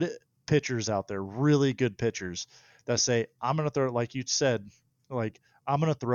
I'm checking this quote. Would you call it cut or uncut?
uncut